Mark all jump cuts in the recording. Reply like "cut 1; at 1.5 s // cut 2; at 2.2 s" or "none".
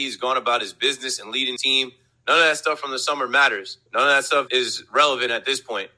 cut 1; at 1.6 s // cut 2; at 3.9 s // cut 3; at 4.5 s

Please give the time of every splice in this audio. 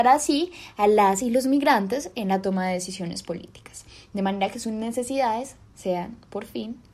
none

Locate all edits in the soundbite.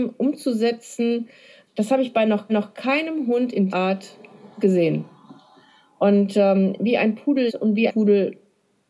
cut 1; at 1.7 s // cut 2; at 2.5 s // cut 3; at 3.7 s // cut 4; at 4.5 s // cut 5; at 7.5 s // cut 6; at 7.9 s

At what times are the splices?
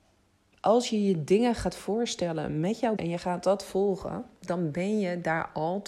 cut 1; at 3.0 s

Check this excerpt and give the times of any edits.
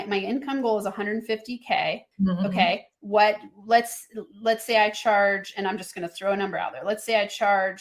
cut 1; at 2.1 s

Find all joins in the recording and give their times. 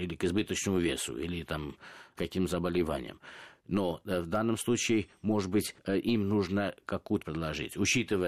cut 1; at 5.8 s // cut 2; at 7.2 s

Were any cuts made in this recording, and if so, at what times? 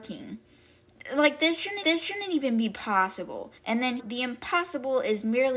cut 1; at 1.8 s // cut 2; at 3.6 s // cut 3; at 4.0 s

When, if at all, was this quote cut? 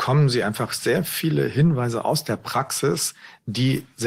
none

